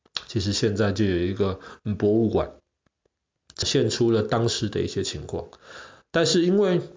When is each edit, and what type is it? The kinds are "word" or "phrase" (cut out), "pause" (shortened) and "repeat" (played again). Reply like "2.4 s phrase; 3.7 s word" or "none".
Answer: none